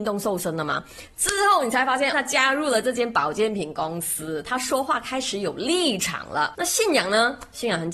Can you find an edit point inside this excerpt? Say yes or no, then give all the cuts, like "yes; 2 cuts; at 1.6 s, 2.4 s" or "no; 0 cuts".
yes; 1 cut; at 2.1 s